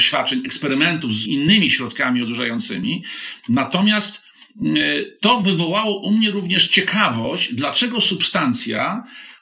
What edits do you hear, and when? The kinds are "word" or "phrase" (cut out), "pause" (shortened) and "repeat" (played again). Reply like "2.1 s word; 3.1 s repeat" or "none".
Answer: 1.3 s word